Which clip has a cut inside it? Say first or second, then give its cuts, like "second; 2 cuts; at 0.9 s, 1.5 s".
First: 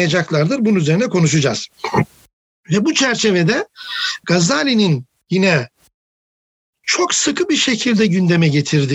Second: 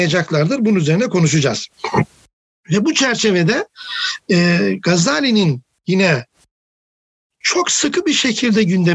first; 1 cut; at 4.2 s